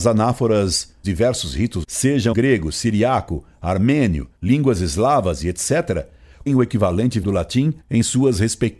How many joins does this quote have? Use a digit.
7